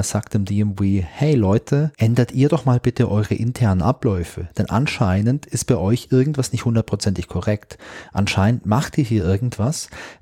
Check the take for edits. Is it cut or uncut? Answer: cut